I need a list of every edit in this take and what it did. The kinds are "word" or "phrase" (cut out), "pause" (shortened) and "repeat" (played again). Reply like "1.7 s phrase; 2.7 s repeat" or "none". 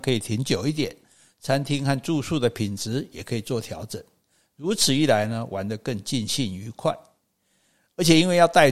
none